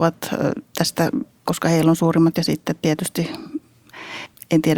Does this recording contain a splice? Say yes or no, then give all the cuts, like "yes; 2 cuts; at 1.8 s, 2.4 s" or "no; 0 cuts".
yes; 2 cuts; at 1.5 s, 2.3 s